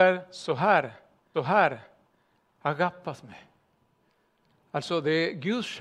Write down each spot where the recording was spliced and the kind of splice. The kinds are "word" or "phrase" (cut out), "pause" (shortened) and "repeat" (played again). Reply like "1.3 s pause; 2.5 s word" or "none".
1.3 s repeat